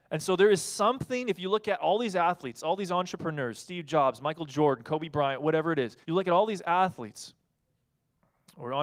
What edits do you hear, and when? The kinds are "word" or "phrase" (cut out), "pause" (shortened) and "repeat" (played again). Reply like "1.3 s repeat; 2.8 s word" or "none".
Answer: 6.0 s pause